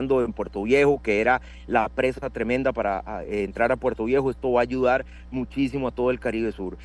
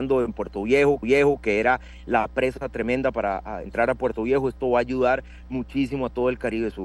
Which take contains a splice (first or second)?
second